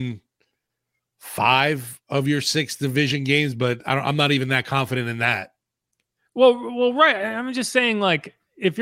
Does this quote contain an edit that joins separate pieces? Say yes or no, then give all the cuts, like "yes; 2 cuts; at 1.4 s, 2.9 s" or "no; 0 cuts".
no; 0 cuts